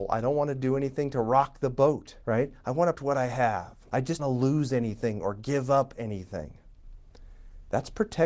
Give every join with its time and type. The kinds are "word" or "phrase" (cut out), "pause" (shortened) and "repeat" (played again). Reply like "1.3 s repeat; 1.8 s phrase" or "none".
2.2 s pause; 2.9 s word; 3.8 s pause; 4.2 s phrase